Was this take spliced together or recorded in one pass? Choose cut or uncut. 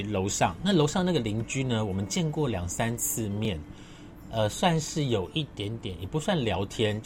uncut